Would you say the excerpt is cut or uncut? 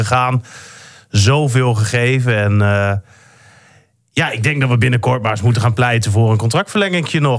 uncut